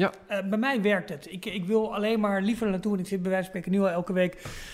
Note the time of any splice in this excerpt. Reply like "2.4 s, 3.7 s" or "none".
none